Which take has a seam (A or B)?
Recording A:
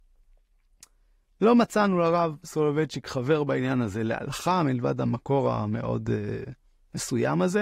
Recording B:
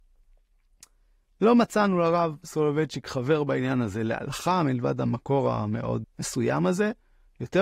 B